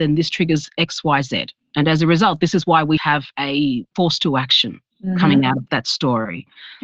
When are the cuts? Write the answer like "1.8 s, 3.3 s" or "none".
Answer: 3.0 s, 5.7 s